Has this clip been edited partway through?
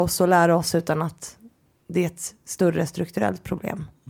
no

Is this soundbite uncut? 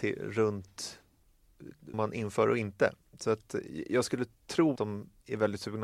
no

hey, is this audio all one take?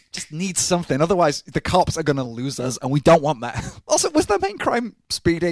yes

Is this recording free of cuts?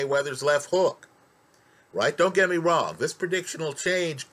yes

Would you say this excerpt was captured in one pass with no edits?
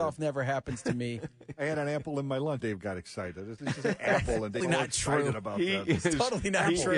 no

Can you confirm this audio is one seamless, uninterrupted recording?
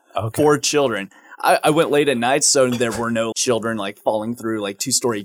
no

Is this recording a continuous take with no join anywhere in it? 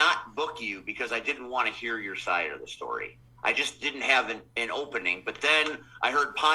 yes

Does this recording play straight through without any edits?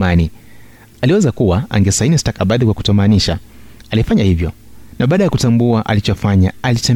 no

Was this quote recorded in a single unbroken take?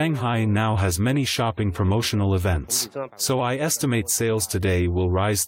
yes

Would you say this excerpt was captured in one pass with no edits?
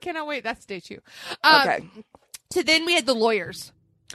yes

